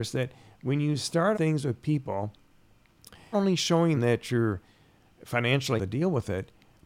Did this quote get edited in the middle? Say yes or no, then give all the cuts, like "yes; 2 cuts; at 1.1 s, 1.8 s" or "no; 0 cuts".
yes; 4 cuts; at 1.3 s, 3.3 s, 4.0 s, 5.8 s